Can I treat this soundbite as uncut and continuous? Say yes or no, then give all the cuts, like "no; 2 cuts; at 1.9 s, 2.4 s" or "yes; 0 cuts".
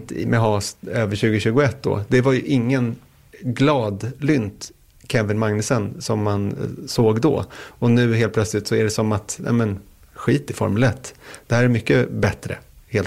yes; 0 cuts